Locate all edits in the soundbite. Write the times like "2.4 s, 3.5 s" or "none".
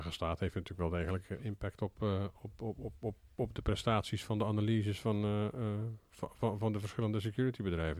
none

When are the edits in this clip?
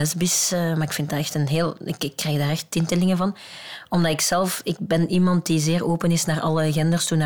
none

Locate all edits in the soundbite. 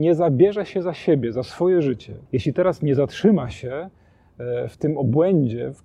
2.3 s

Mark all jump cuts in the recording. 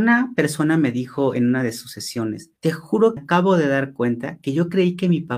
2.6 s, 3.2 s

